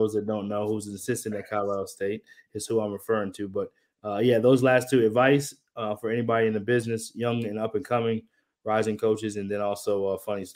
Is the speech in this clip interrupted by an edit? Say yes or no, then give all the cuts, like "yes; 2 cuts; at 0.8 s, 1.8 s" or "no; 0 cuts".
no; 0 cuts